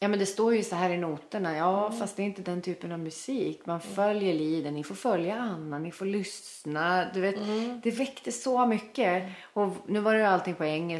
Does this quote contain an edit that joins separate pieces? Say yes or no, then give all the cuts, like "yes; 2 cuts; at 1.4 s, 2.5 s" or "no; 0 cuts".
no; 0 cuts